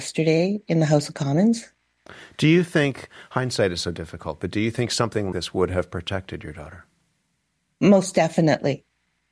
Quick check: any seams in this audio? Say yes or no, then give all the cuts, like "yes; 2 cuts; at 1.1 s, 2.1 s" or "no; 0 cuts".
yes; 1 cut; at 5.3 s